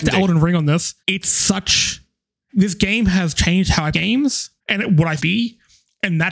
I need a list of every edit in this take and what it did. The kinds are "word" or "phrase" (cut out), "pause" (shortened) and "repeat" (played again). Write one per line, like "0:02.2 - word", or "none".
0:01.0 - pause
0:02.5 - word
0:03.9 - word
0:04.6 - pause
0:05.2 - phrase